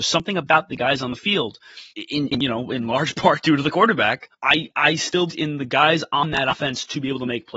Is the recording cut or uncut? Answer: cut